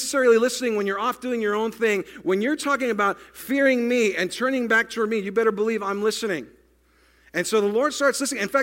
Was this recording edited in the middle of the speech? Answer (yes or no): no